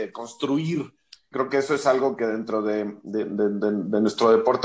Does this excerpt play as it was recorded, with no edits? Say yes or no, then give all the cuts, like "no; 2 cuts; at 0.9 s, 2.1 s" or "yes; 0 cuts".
no; 1 cut; at 1.3 s